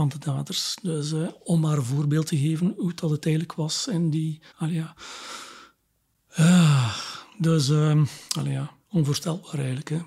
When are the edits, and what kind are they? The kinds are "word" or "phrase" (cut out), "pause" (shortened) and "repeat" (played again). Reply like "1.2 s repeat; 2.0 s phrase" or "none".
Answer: 4.5 s pause; 8.3 s pause; 8.8 s pause